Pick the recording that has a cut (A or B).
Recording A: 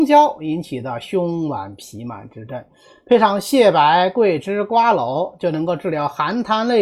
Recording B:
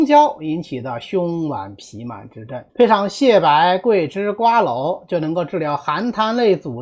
B